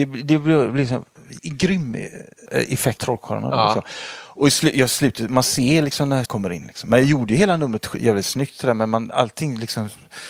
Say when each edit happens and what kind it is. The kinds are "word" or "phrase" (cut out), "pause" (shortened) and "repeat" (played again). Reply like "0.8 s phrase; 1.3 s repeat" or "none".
1.4 s word; 2.5 s word; 3.0 s word; 6.3 s word